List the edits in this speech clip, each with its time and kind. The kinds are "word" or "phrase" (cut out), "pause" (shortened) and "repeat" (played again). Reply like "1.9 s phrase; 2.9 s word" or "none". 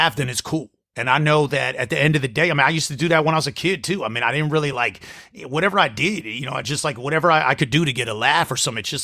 none